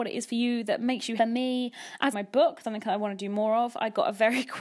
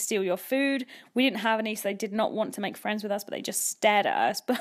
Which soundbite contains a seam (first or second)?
first